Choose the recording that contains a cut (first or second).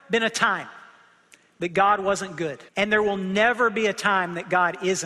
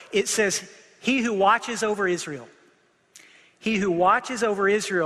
first